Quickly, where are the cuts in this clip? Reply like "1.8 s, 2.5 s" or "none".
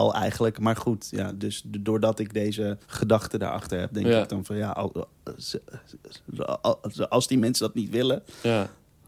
2.8 s